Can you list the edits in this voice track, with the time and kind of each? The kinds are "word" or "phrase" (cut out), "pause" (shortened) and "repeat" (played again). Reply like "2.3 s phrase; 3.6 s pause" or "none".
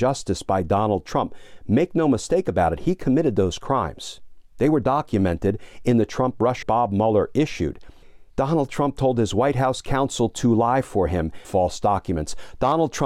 4.5 s pause; 6.6 s phrase; 8.3 s pause; 11.4 s phrase